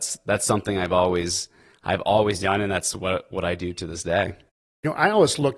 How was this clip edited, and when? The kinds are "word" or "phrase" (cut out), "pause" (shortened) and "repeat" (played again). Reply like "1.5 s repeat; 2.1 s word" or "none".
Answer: none